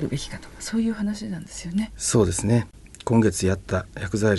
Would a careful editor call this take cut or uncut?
uncut